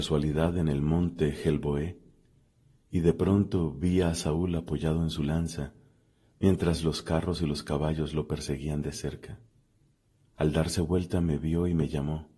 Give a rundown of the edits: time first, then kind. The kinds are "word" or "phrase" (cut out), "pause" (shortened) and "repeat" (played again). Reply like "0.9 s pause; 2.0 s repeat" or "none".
10.0 s pause